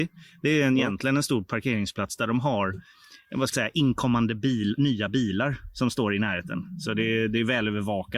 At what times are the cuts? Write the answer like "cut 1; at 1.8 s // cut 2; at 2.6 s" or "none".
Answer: cut 1; at 3.5 s